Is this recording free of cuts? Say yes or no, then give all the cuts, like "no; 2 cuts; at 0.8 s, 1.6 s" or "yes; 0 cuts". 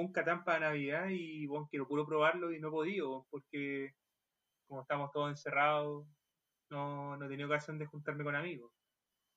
yes; 0 cuts